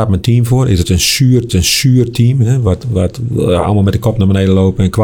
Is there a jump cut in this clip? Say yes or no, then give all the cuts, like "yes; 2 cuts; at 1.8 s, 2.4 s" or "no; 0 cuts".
yes; 1 cut; at 1.5 s